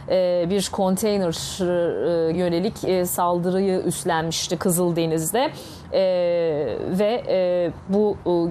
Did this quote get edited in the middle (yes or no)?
yes